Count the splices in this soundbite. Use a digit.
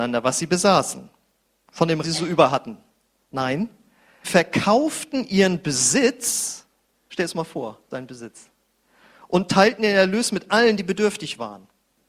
4